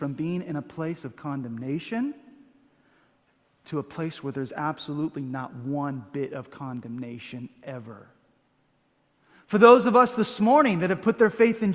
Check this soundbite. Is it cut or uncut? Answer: uncut